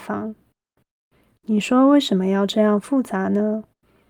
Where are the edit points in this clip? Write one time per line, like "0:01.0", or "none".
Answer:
none